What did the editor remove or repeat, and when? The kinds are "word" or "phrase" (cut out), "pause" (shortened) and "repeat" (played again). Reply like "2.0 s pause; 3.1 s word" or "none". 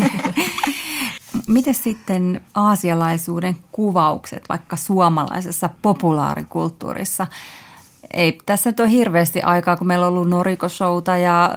none